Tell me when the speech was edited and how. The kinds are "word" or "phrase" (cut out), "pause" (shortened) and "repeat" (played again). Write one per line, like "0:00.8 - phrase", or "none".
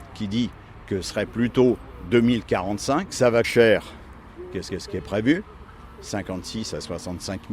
0:01.0 - word
0:03.1 - word
0:03.4 - phrase
0:04.7 - repeat